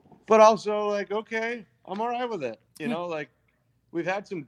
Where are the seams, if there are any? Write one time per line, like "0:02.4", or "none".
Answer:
0:02.7